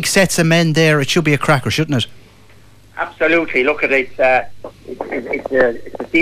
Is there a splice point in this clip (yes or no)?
no